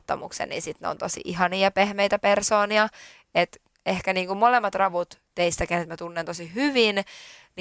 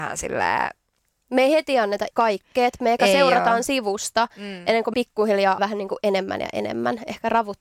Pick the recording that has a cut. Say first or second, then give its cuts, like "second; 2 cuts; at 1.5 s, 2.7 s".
second; 3 cuts; at 2.1 s, 4.9 s, 5.6 s